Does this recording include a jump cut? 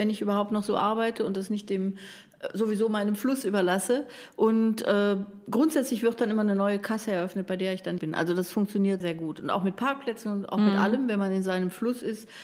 yes; 2 cuts; at 8.0 s, 9.0 s

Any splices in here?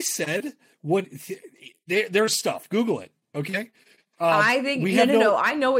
no; 0 cuts

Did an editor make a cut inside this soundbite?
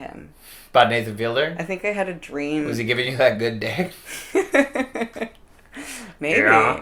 no; 0 cuts

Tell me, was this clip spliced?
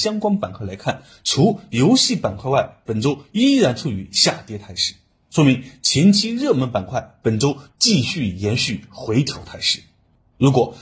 no; 0 cuts

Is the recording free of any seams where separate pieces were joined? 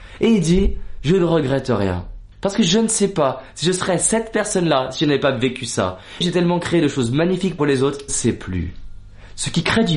no; 4 cuts; at 2.3 s, 6.2 s, 7.6 s, 8.1 s

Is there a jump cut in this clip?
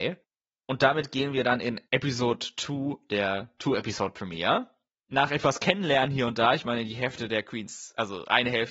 no; 0 cuts

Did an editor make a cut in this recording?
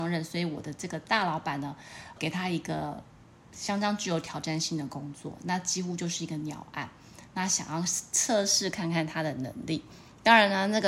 yes; 1 cut; at 2.2 s

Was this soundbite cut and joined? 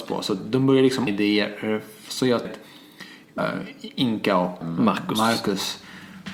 yes; 4 cuts; at 1.1 s, 2.4 s, 3.4 s, 4.6 s

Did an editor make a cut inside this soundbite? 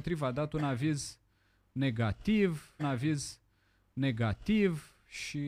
yes; 1 cut; at 2.8 s

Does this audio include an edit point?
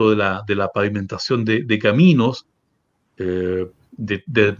no; 0 cuts

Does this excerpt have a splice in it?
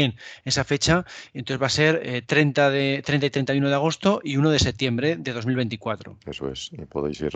no; 0 cuts

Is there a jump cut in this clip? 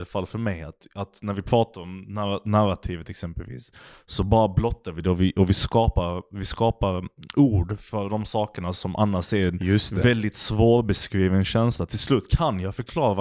no; 0 cuts

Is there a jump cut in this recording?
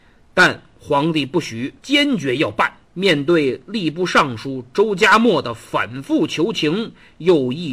yes; 2 cuts; at 1.8 s, 2.8 s

